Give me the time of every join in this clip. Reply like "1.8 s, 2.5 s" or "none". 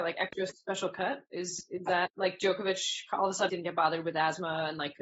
3.5 s